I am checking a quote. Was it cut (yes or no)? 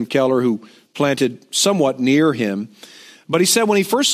no